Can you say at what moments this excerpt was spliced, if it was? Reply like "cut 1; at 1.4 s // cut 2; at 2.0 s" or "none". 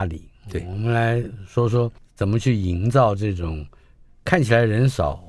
cut 1; at 2.0 s